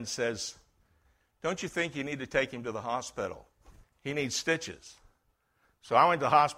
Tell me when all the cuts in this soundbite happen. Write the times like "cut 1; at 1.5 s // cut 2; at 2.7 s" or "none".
cut 1; at 3.8 s